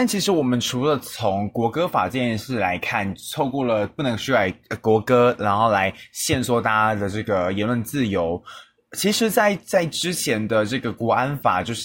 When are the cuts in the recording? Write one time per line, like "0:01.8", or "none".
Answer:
none